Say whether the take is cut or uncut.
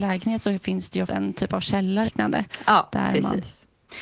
cut